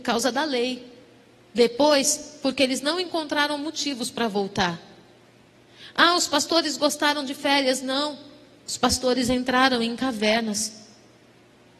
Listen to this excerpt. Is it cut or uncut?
uncut